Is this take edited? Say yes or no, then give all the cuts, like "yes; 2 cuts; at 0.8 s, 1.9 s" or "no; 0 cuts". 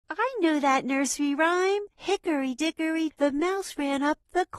yes; 1 cut; at 3.1 s